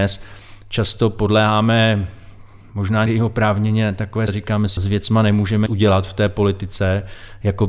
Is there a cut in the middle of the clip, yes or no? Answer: yes